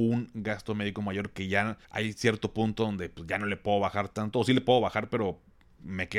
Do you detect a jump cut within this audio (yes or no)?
yes